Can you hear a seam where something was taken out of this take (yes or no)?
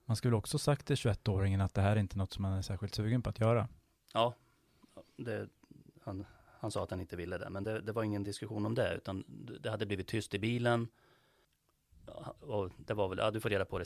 no